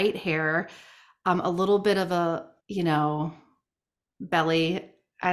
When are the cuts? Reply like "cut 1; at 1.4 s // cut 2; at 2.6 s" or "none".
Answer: cut 1; at 2.6 s